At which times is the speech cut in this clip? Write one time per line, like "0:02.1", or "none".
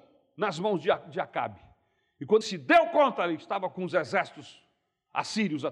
0:02.4